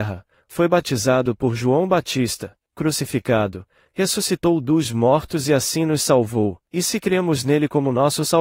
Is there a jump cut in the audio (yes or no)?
yes